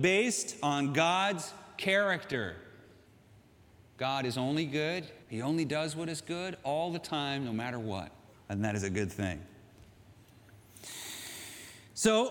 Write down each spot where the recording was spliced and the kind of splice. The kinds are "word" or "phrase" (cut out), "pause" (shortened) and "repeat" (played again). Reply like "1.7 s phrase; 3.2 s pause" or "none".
3.1 s pause; 5.2 s pause; 8.3 s pause